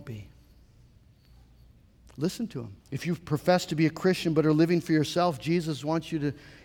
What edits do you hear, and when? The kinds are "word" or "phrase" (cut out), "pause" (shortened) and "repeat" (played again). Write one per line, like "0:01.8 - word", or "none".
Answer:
0:02.8 - pause